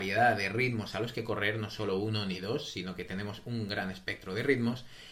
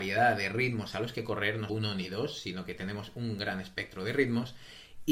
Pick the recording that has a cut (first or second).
second